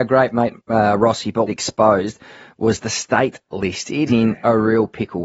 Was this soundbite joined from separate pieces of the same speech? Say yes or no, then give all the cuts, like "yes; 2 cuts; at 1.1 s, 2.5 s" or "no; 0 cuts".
yes; 3 cuts; at 1.5 s, 3.5 s, 4.1 s